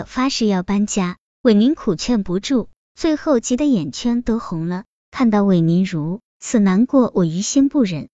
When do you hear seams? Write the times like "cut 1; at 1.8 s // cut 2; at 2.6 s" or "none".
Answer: cut 1; at 6.3 s

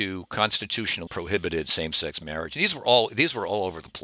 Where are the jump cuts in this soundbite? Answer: cut 1; at 1.1 s

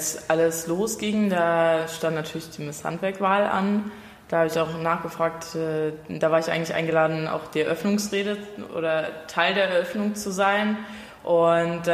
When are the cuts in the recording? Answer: none

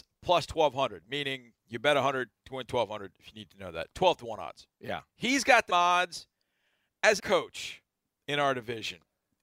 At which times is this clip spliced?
cut 1; at 1.6 s // cut 2; at 5.1 s // cut 3; at 5.7 s // cut 4; at 7.2 s

